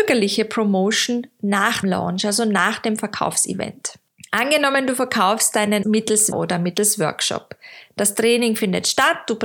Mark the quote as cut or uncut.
cut